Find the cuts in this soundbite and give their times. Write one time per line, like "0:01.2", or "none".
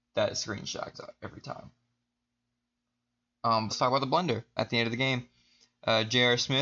0:00.9
0:03.7
0:04.6

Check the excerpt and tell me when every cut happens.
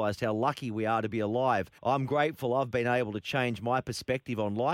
0:01.8

